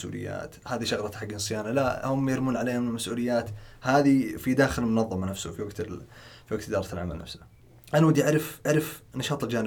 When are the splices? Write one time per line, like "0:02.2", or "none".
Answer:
0:07.6
0:08.6

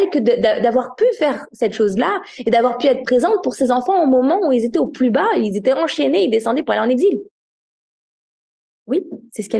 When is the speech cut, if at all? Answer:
none

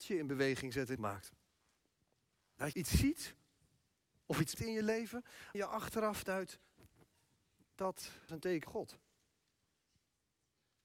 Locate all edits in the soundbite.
0:01.0
0:02.7
0:04.5
0:05.5
0:08.3
0:08.6

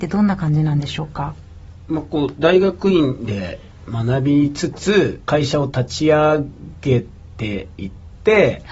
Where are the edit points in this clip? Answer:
0:05.2

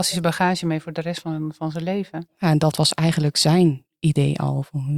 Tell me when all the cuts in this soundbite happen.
none

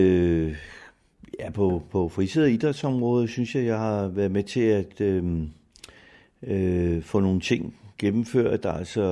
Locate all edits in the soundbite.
none

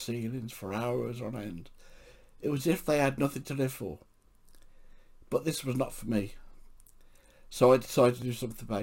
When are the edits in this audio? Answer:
none

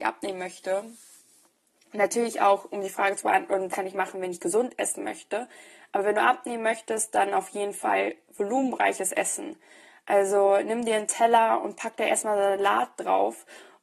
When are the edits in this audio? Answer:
0:03.7

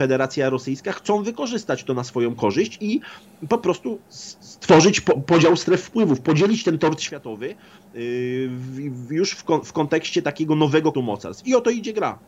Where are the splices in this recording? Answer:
0:10.9

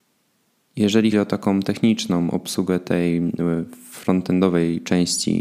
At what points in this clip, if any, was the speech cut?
0:01.1

